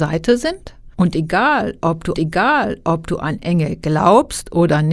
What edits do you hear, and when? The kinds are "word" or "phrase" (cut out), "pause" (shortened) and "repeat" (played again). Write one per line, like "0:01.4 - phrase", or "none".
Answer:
0:00.9 - pause
0:02.1 - repeat

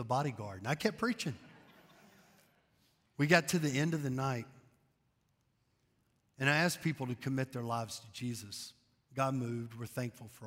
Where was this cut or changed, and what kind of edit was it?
none

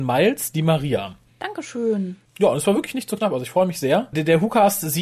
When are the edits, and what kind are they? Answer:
none

